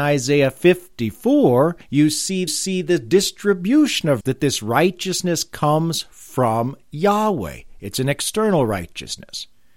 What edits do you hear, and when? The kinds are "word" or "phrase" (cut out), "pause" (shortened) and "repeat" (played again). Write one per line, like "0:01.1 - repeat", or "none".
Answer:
0:01.8 - pause
0:02.5 - repeat
0:04.2 - word